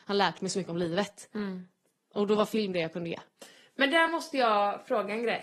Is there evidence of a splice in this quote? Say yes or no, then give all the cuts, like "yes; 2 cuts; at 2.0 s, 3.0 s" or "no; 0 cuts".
no; 0 cuts